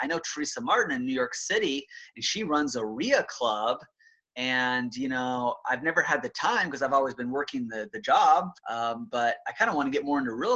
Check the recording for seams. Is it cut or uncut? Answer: cut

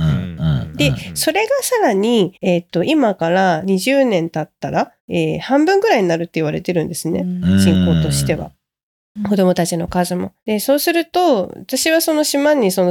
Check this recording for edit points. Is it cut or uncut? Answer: cut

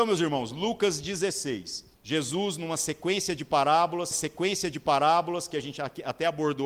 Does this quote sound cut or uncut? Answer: cut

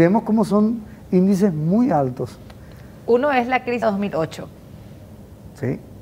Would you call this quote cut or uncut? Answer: cut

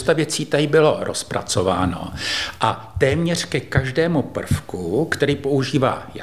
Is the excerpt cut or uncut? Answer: uncut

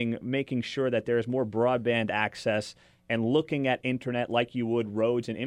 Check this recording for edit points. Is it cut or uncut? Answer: uncut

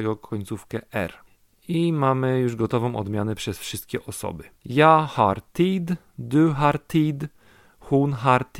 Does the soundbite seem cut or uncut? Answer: cut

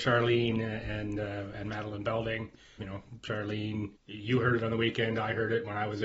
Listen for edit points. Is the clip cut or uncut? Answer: cut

